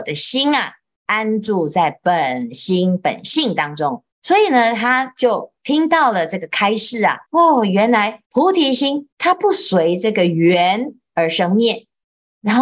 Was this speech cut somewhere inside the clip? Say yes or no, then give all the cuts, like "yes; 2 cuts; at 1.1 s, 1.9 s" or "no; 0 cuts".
yes; 4 cuts; at 4.1 s, 7.3 s, 8.3 s, 9.1 s